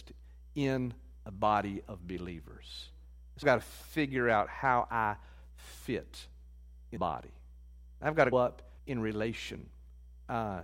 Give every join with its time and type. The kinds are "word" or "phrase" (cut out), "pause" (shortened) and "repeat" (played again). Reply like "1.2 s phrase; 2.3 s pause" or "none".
3.4 s word; 7.0 s word; 8.3 s word; 8.8 s pause